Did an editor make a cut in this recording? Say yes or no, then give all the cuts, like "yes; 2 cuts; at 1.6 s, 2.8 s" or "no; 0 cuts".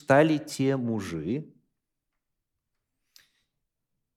no; 0 cuts